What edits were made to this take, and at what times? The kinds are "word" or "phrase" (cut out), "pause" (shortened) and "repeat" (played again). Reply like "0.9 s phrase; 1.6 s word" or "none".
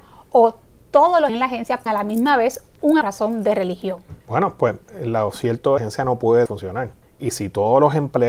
1.3 s phrase; 1.9 s word; 3.0 s phrase; 4.2 s pause; 5.8 s phrase; 6.5 s phrase; 7.0 s pause